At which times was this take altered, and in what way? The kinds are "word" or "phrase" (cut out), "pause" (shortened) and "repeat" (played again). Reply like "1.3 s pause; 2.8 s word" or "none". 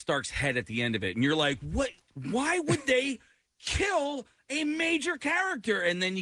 2.0 s pause